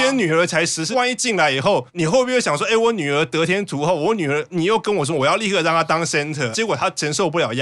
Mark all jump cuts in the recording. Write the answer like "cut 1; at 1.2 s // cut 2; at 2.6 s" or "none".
cut 1; at 0.9 s // cut 2; at 6.5 s